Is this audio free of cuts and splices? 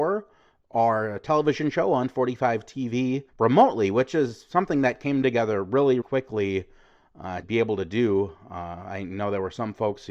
no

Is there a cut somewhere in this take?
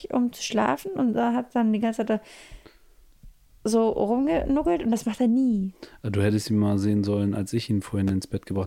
no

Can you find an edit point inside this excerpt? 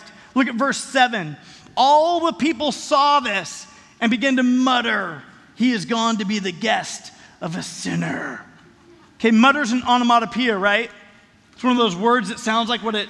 no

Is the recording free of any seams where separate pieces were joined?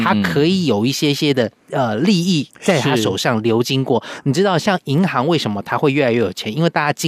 no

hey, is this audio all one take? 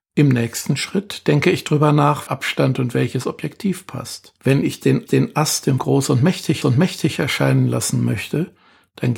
no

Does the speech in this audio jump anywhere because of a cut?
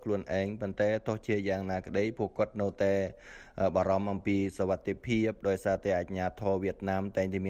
no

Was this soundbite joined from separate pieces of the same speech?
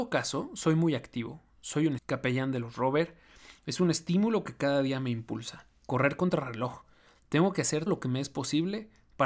yes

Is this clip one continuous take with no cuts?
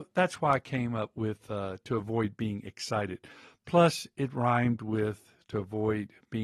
yes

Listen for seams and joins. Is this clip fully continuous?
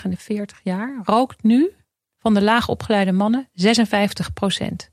yes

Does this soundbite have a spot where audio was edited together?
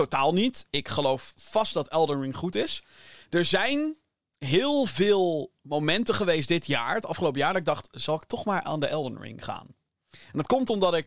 no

